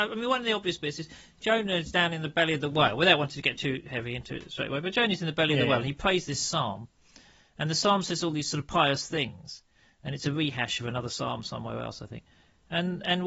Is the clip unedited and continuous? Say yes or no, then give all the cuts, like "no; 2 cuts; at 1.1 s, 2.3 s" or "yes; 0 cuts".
yes; 0 cuts